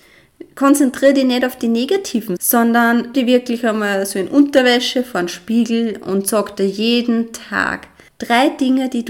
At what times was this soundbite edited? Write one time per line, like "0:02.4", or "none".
0:02.4
0:03.1
0:08.1

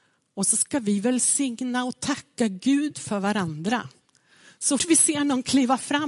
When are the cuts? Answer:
0:04.8

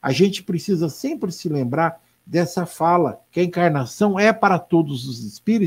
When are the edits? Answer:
0:03.3

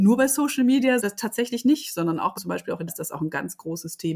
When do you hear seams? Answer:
0:01.0
0:02.4
0:02.9

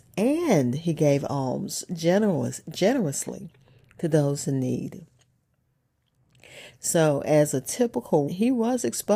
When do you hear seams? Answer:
0:08.3

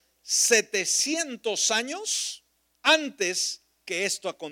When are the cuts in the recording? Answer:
0:02.7

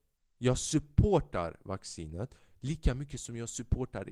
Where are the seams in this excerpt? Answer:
none

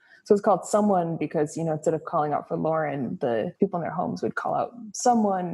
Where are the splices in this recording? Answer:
0:03.6

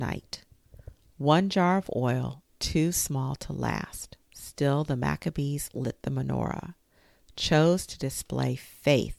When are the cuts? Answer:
none

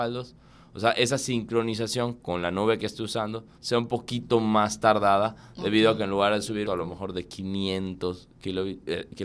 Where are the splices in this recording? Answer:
0:03.5
0:06.6

